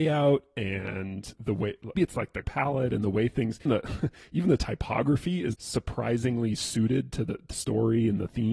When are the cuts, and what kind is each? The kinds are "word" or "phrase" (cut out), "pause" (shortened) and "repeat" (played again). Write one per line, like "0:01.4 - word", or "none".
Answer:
0:01.3 - word
0:01.9 - word
0:02.4 - word
0:03.7 - word
0:05.5 - word
0:07.5 - word

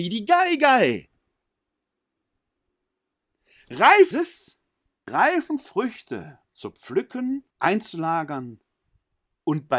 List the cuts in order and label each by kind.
0:04.1 - word
0:05.1 - word
0:06.4 - pause
0:07.5 - pause

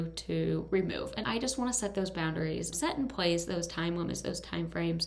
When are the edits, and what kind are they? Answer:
0:01.2 - word
0:02.7 - word

